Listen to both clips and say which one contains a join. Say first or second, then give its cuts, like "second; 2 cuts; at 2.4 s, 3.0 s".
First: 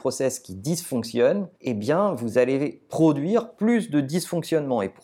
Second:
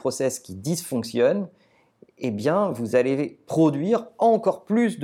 first; 2 cuts; at 1.6 s, 3.6 s